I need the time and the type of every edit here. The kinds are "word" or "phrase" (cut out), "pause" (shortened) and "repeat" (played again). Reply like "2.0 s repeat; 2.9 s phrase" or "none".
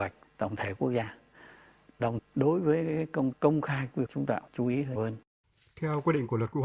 2.2 s word; 3.3 s word; 4.1 s word; 4.5 s word; 5.0 s word